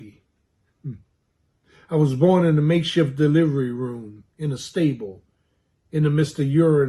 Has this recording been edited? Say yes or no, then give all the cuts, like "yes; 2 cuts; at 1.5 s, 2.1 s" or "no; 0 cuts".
no; 0 cuts